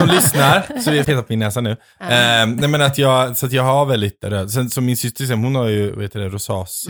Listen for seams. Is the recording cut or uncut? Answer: cut